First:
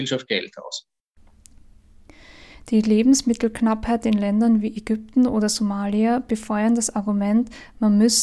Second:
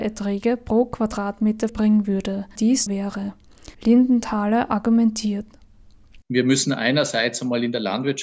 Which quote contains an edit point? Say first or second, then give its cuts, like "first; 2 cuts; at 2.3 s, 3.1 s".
second; 5 cuts; at 1.7 s, 2.6 s, 2.9 s, 3.7 s, 6.2 s